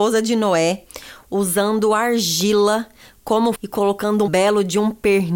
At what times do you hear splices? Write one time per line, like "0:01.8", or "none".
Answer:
0:03.5
0:04.3